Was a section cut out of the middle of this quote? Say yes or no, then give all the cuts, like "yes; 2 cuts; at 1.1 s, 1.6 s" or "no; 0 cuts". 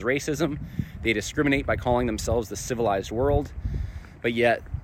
no; 0 cuts